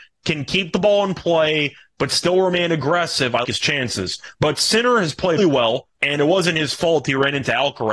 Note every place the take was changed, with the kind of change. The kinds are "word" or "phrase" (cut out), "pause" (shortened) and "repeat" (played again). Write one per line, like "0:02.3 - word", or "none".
0:03.4 - word
0:04.3 - pause
0:05.4 - word
0:05.9 - pause